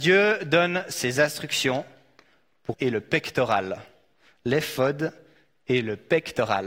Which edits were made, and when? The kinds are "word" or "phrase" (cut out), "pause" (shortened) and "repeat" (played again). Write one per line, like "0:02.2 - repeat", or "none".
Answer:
0:02.7 - word